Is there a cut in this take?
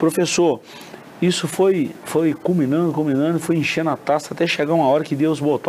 no; 0 cuts

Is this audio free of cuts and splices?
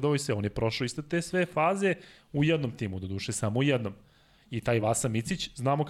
yes; 0 cuts

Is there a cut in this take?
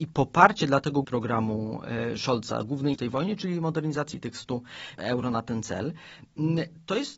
yes; 4 cuts; at 1.0 s, 2.9 s, 4.1 s, 5.0 s

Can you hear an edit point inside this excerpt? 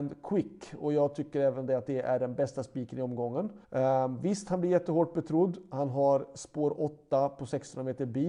yes; 1 cut; at 3.6 s

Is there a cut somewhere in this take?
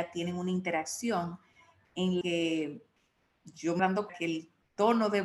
yes; 3 cuts; at 2.2 s, 3.8 s, 4.1 s

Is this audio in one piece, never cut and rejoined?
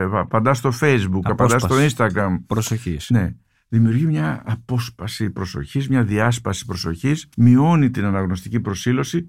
no; 1 cut; at 7.3 s

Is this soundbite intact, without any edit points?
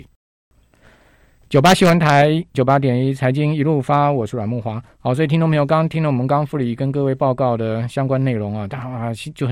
no; 1 cut; at 2.5 s

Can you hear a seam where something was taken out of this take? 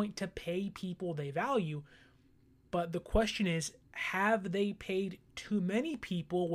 no; 0 cuts

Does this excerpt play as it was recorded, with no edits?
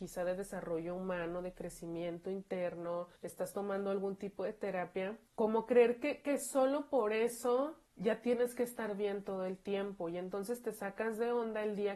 no; 3 cuts; at 3.2 s, 5.3 s, 7.9 s

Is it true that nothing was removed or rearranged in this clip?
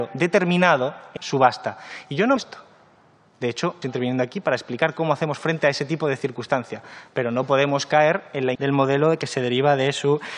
no; 4 cuts; at 1.2 s, 2.4 s, 3.8 s, 8.5 s

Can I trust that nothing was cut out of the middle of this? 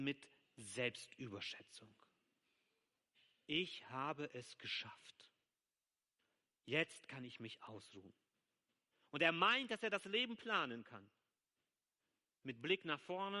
yes; 0 cuts

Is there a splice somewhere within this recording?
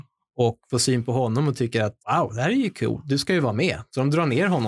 yes; 1 cut; at 2.0 s

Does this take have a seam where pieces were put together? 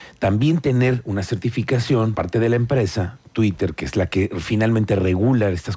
yes; 1 cut; at 2.2 s

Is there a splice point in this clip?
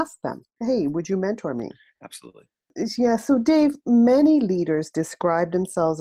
no; 0 cuts

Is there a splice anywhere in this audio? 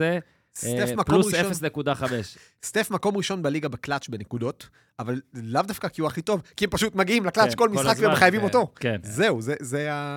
no; 0 cuts

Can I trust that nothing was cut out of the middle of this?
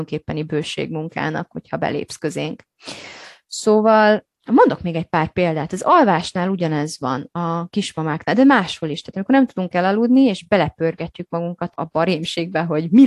no; 1 cut; at 4.3 s

